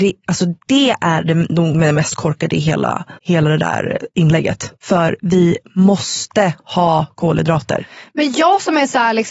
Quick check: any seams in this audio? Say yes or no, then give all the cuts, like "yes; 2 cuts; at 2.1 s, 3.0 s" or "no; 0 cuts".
yes; 2 cuts; at 3.2 s, 4.8 s